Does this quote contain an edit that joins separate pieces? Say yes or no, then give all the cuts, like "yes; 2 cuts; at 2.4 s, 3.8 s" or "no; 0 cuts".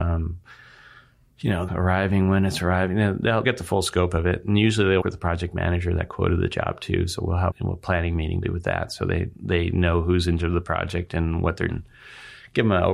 yes; 8 cuts; at 1.7 s, 3.4 s, 5.0 s, 7.5 s, 8.4 s, 9.3 s, 10.4 s, 11.7 s